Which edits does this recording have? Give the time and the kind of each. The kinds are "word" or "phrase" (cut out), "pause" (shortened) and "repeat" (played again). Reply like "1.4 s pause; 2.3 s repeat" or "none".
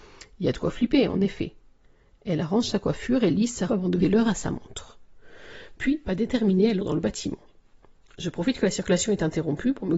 3.7 s word; 4.0 s word; 6.0 s word; 6.8 s word